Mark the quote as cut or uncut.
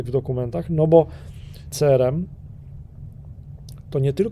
cut